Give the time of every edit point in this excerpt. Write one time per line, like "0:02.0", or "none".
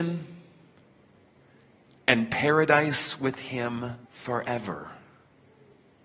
0:04.0